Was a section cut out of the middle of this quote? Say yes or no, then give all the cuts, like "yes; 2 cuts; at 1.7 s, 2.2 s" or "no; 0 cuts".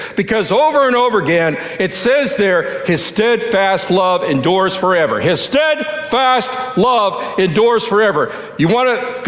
no; 0 cuts